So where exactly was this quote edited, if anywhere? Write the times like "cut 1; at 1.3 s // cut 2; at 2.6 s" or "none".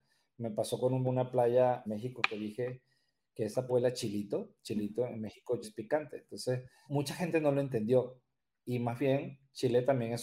cut 1; at 1.0 s // cut 2; at 1.9 s // cut 3; at 3.7 s // cut 4; at 5.6 s // cut 5; at 6.9 s